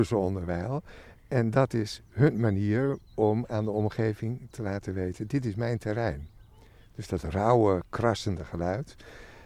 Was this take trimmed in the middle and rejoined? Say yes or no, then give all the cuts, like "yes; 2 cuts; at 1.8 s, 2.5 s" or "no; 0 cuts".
no; 0 cuts